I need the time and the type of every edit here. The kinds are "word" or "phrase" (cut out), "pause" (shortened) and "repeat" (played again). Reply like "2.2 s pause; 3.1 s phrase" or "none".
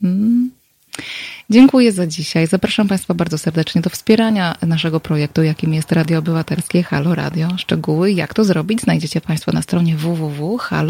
none